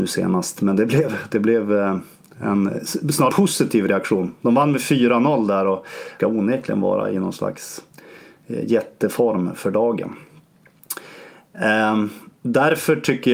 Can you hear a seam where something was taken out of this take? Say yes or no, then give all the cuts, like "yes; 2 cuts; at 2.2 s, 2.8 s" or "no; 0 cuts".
yes; 2 cuts; at 3.3 s, 6.2 s